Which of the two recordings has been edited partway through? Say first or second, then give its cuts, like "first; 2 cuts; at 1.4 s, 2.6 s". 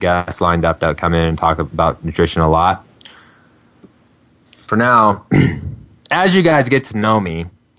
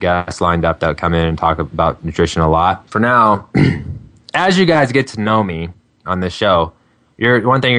second; 1 cut; at 2.9 s